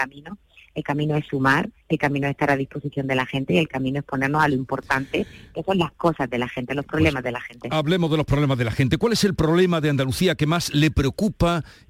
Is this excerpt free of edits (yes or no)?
no